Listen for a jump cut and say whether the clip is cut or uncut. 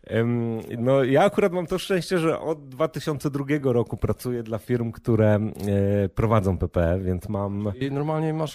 uncut